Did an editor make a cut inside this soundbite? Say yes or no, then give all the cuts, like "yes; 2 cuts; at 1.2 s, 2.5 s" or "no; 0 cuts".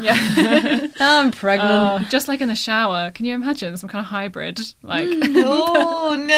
no; 0 cuts